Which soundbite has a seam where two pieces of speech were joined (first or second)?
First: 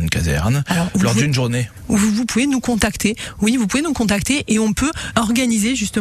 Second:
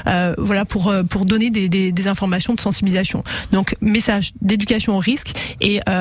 first